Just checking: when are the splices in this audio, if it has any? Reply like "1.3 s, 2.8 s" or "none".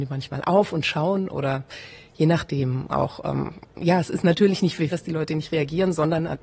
4.9 s